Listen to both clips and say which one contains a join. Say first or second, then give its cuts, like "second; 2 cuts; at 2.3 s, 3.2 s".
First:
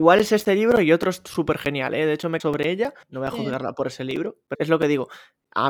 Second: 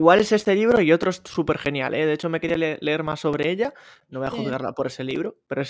first; 3 cuts; at 2.4 s, 3.0 s, 4.5 s